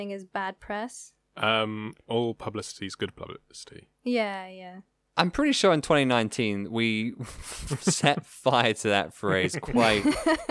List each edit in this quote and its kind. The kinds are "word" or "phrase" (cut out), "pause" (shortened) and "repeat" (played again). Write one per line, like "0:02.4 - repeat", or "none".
none